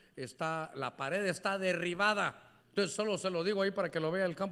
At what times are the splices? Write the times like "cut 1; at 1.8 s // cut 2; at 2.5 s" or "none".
cut 1; at 2.6 s